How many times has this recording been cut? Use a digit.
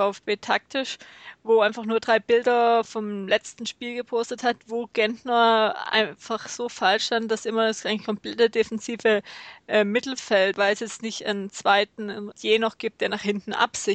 2